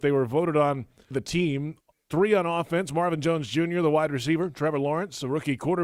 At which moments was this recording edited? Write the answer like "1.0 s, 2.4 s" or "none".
1.1 s